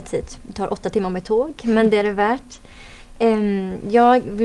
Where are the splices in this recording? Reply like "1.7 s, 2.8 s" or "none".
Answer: none